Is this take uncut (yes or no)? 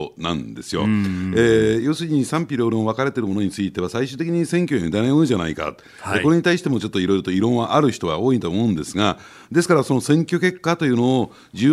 yes